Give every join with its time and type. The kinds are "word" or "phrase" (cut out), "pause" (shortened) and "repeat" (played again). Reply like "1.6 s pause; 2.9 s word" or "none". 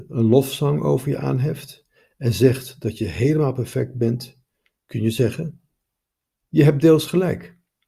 none